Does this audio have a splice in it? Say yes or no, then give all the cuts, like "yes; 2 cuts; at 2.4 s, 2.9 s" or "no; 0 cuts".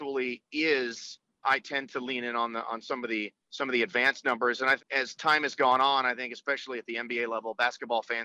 yes; 4 cuts; at 1.4 s, 1.9 s, 3.4 s, 4.8 s